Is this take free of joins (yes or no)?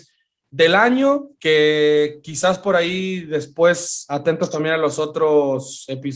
no